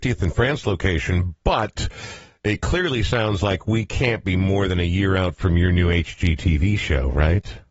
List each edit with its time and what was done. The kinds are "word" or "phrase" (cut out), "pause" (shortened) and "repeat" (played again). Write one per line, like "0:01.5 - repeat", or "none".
none